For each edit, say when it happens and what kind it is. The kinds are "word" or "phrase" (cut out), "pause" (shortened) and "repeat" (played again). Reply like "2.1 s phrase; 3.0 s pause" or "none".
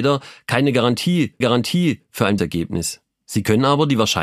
1.4 s repeat; 2.4 s word; 3.1 s pause